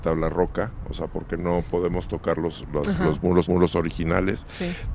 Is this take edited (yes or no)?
yes